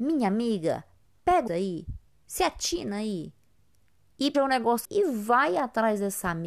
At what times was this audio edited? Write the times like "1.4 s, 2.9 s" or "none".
1.0 s, 1.5 s, 2.1 s, 4.3 s, 4.8 s